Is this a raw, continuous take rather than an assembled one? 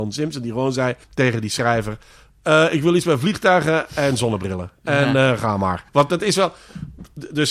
no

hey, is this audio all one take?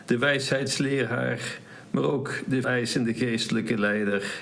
no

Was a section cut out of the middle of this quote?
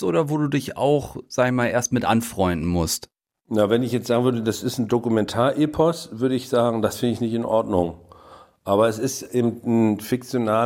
no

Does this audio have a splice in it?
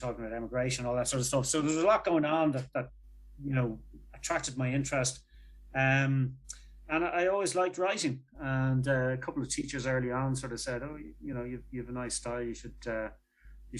no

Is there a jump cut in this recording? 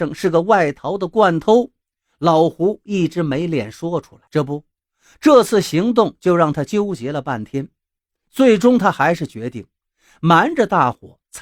yes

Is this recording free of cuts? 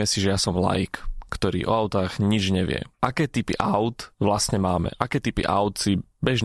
no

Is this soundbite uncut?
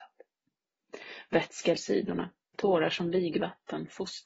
no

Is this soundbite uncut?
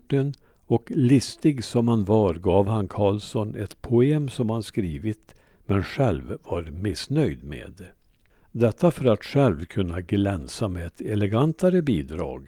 yes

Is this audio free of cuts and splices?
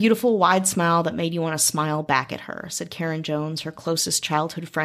yes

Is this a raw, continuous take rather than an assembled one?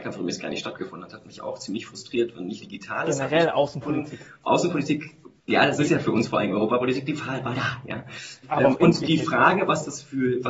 no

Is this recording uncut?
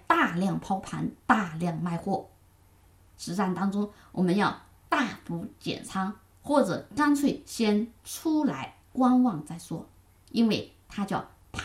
no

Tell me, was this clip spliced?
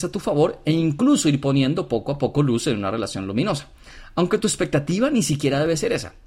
no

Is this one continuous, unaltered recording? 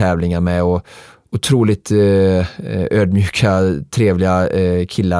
yes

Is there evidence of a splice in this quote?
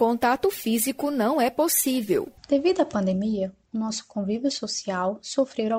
yes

